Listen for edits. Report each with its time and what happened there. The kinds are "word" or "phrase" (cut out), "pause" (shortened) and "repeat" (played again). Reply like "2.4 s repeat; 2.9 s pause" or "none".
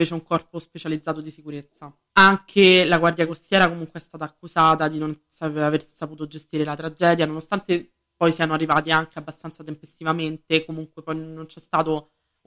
none